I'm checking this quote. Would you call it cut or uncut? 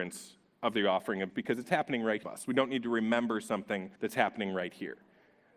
cut